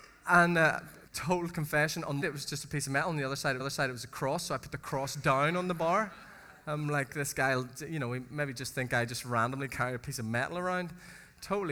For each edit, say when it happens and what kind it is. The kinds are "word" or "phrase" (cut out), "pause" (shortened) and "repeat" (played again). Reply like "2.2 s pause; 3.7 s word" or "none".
1.1 s pause; 2.2 s phrase; 3.6 s repeat; 6.6 s pause